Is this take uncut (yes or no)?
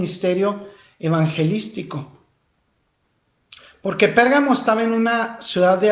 yes